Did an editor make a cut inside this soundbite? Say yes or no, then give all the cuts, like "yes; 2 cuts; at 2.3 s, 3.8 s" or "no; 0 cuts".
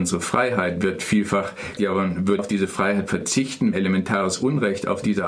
yes; 3 cuts; at 1.8 s, 2.4 s, 3.7 s